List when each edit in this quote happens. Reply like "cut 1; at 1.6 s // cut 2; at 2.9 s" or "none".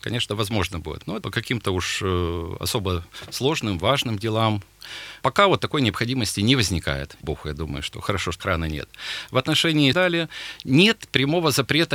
cut 1; at 1.2 s // cut 2; at 5.2 s // cut 3; at 7.2 s // cut 4; at 8.4 s // cut 5; at 9.9 s